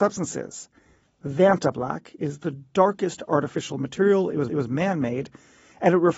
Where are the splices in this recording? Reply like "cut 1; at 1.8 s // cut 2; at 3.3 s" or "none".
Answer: cut 1; at 4.5 s